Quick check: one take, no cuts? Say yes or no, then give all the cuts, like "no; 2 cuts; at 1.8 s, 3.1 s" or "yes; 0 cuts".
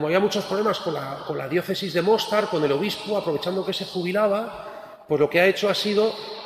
yes; 0 cuts